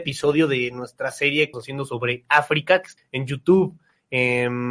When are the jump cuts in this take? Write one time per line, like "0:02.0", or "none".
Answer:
0:01.5
0:03.0